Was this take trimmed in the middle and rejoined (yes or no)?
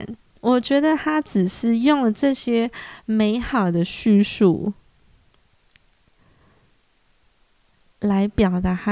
no